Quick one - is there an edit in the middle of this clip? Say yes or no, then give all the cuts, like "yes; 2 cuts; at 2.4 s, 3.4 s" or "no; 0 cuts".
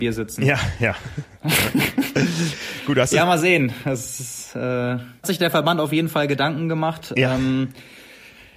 yes; 1 cut; at 5.2 s